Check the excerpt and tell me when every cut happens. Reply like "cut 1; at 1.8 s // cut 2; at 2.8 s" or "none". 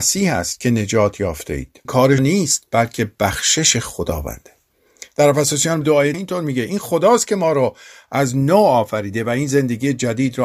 cut 1; at 1.9 s // cut 2; at 2.2 s // cut 3; at 5.8 s // cut 4; at 6.1 s